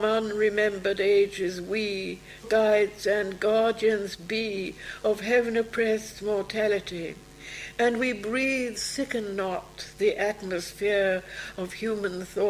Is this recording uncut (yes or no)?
no